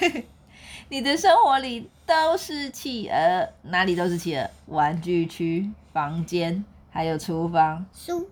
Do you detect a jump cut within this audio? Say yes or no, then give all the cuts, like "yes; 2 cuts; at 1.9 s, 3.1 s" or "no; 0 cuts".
yes; 1 cut; at 6.7 s